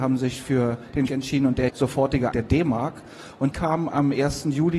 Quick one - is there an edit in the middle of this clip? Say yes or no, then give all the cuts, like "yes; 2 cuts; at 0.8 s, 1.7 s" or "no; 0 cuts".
yes; 4 cuts; at 1.1 s, 1.7 s, 2.3 s, 3.5 s